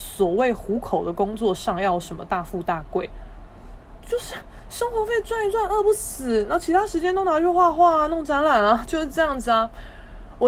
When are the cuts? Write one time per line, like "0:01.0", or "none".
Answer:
none